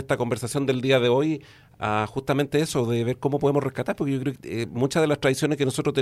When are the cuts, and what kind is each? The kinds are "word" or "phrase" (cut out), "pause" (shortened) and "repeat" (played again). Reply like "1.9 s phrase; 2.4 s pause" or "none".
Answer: 4.3 s word